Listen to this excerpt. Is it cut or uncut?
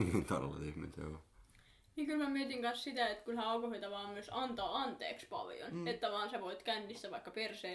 uncut